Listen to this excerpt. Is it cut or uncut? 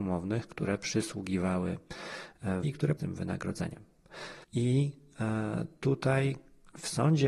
cut